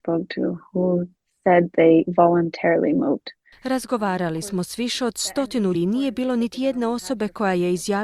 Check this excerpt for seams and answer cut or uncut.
cut